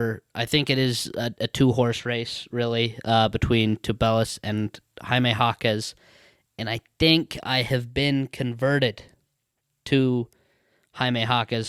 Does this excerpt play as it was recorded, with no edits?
yes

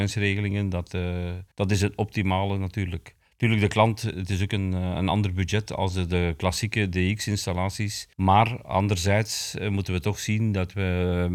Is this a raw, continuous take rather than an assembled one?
no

